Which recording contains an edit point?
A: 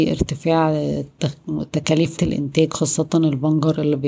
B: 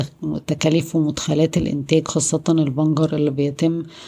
A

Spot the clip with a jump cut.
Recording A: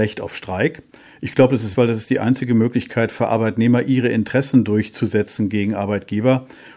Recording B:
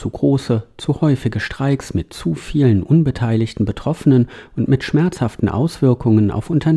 A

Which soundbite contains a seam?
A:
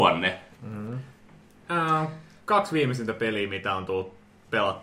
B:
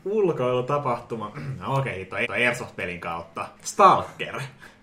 B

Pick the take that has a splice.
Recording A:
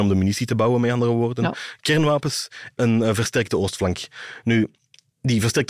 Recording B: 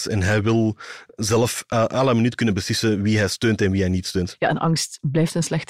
A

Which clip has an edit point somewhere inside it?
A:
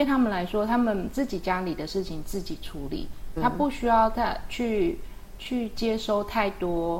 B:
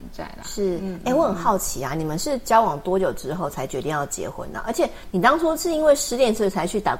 A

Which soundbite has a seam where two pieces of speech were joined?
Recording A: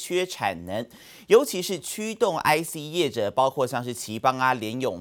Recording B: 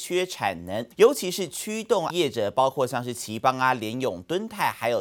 B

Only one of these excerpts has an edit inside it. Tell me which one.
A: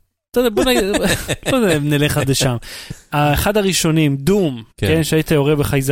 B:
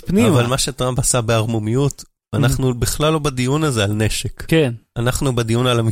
A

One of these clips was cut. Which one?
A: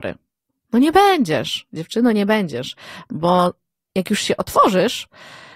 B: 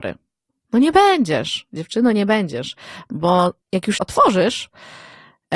B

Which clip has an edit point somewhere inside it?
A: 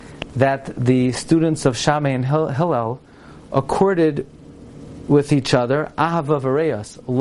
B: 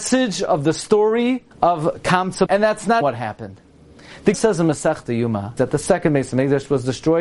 B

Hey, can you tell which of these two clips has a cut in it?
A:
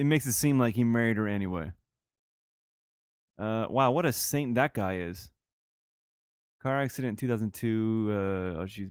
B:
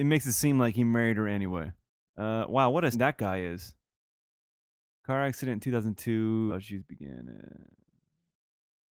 B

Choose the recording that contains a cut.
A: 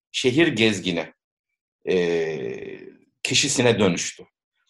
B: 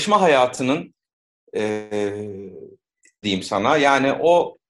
B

